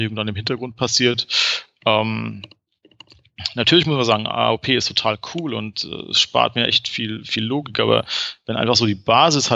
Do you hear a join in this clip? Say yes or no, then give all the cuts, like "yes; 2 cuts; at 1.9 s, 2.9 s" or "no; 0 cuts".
no; 0 cuts